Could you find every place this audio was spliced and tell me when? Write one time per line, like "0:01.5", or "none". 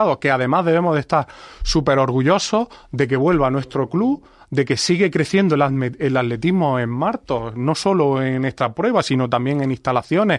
none